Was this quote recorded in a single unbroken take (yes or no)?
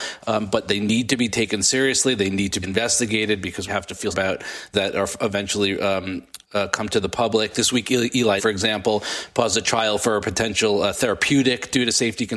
no